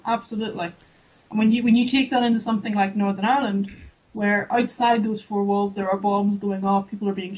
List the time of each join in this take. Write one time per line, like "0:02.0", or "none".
none